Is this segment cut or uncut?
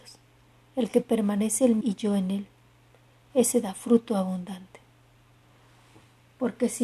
cut